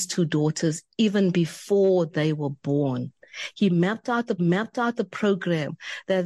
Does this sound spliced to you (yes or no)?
yes